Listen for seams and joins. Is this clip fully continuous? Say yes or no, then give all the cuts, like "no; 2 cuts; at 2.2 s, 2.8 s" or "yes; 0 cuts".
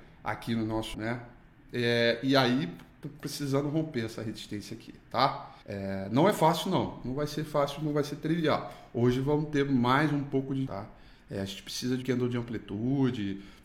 no; 4 cuts; at 0.9 s, 5.6 s, 10.7 s, 12.0 s